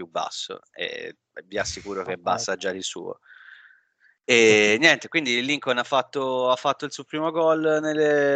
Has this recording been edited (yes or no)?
no